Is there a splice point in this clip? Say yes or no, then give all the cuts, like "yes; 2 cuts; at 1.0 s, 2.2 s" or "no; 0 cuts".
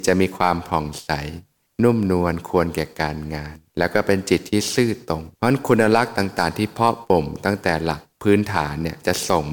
yes; 4 cuts; at 1.7 s, 3.7 s, 5.3 s, 8.1 s